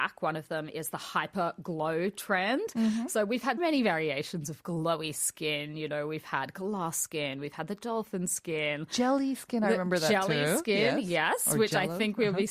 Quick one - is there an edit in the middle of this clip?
yes; 1 cut; at 3.6 s

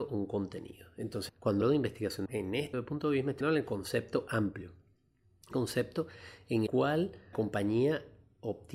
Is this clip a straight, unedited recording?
no; 8 cuts; at 1.3 s, 1.6 s, 2.3 s, 2.7 s, 3.4 s, 5.5 s, 6.7 s, 7.3 s

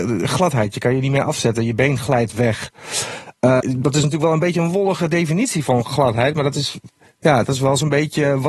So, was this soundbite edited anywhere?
yes; 1 cut; at 3.6 s

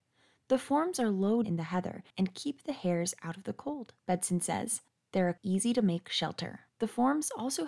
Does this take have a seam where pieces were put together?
yes; 6 cuts; at 1.4 s, 2.1 s, 4.0 s, 4.9 s, 5.4 s, 6.7 s

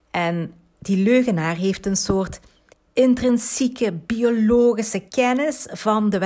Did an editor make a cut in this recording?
yes; 2 cuts; at 2.7 s, 5.1 s

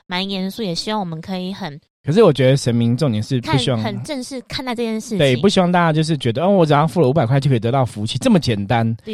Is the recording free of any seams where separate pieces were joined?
yes; 0 cuts

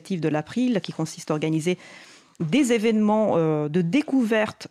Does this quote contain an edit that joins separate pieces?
no; 0 cuts

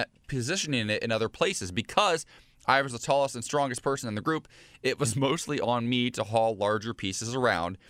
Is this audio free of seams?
yes; 0 cuts

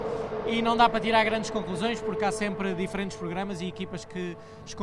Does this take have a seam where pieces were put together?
no; 0 cuts

